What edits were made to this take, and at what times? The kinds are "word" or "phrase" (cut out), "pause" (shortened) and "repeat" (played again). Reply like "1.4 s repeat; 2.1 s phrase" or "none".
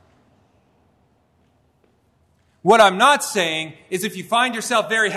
none